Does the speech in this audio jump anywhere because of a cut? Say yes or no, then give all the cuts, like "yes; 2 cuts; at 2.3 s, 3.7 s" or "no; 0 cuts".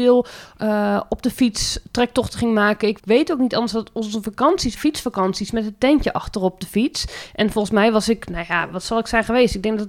yes; 2 cuts; at 3.0 s, 4.8 s